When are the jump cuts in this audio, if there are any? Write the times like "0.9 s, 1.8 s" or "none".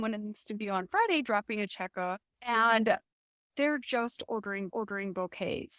2.3 s, 4.7 s